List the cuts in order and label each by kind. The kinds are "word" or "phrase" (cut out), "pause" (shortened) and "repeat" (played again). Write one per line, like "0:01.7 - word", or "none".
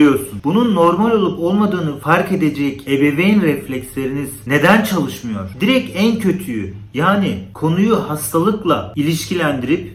none